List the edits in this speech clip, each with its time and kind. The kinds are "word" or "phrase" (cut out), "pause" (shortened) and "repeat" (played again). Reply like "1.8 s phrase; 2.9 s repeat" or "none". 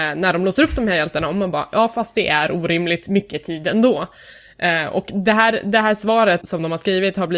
6.4 s word